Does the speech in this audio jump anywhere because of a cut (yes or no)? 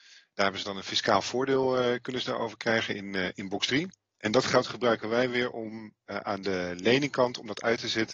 no